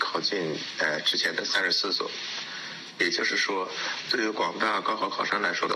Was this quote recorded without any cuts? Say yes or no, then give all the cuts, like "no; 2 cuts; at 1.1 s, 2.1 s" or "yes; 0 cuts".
yes; 0 cuts